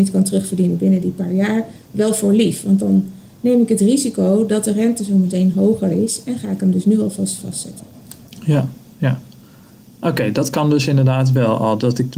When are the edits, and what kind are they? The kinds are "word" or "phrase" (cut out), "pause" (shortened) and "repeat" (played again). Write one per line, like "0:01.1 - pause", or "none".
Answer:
none